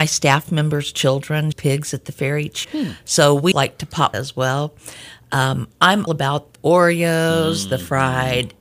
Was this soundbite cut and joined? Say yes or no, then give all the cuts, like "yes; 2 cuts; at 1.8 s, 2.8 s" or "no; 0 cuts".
yes; 6 cuts; at 1.5 s, 2.6 s, 3.5 s, 4.1 s, 6.1 s, 6.5 s